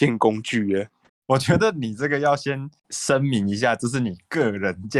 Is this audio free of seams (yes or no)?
no